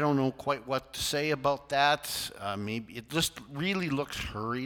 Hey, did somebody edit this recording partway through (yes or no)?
no